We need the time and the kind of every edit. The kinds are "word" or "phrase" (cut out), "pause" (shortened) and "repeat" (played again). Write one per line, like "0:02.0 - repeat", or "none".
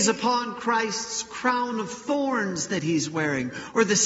none